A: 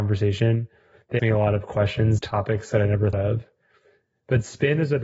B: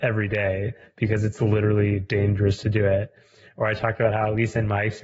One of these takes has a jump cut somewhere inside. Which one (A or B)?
A